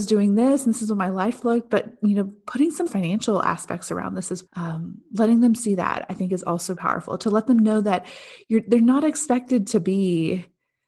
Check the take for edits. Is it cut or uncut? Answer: cut